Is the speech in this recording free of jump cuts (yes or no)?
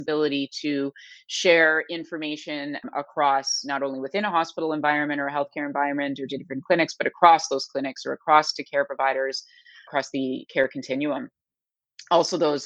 yes